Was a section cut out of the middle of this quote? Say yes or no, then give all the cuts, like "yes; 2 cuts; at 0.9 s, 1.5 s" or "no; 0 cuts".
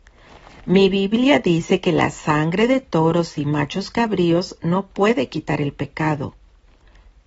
no; 0 cuts